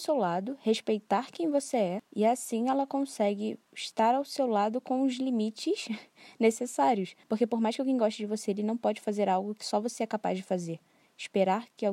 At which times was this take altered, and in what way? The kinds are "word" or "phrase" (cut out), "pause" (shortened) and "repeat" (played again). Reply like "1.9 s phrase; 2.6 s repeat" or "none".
7.2 s pause